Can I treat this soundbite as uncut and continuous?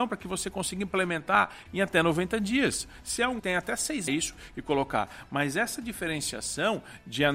no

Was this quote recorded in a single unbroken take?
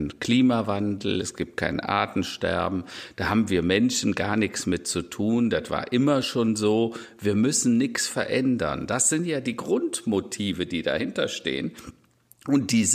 yes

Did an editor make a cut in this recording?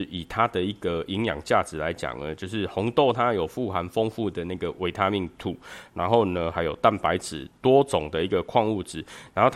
yes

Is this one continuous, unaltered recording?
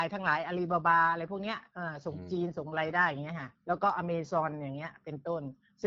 no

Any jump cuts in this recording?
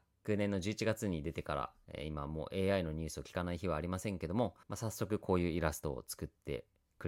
yes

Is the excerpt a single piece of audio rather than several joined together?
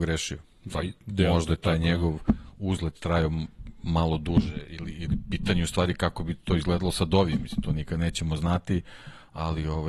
yes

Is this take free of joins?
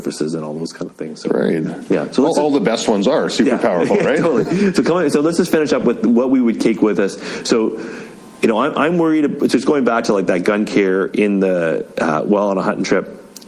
yes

